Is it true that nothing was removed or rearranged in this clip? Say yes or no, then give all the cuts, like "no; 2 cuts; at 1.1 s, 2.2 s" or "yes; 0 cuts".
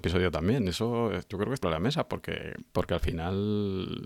no; 3 cuts; at 1.3 s, 1.6 s, 2.7 s